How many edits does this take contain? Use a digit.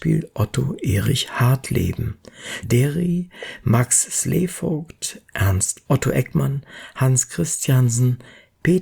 2